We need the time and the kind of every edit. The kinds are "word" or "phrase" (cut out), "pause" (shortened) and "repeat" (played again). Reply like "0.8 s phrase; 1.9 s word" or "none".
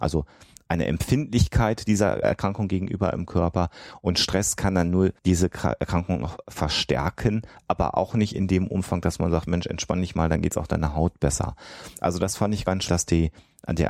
2.2 s word; 5.2 s pause; 12.9 s word